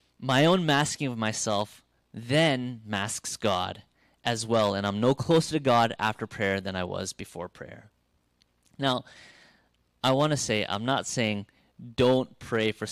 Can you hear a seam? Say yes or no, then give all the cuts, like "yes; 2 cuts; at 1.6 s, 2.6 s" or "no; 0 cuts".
no; 0 cuts